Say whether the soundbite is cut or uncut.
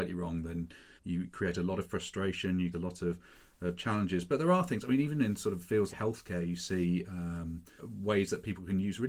cut